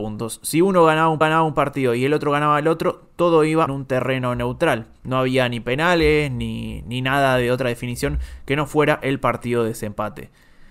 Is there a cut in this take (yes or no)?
yes